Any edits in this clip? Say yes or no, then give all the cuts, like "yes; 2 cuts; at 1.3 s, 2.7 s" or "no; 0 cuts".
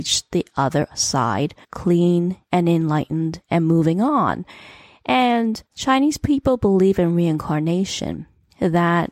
yes; 2 cuts; at 1.6 s, 5.7 s